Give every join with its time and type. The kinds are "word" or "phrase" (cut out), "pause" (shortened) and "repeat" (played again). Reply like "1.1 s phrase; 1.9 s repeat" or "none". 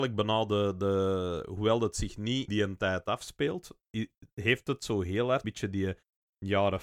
2.5 s word; 5.4 s word